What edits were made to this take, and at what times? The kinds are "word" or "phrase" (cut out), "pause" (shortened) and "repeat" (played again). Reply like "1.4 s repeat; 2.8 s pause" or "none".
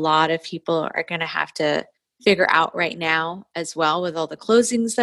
1.9 s pause